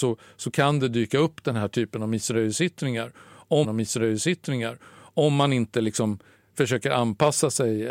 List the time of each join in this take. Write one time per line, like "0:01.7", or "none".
0:03.6